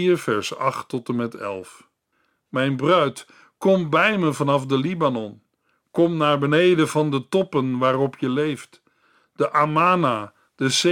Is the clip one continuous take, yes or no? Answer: yes